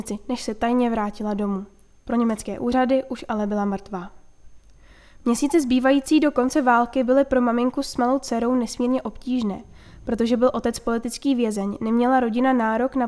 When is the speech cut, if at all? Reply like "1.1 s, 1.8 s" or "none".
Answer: none